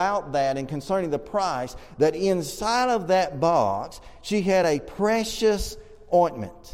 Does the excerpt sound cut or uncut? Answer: uncut